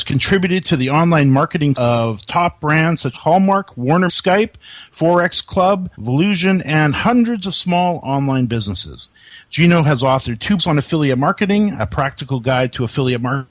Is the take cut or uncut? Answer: cut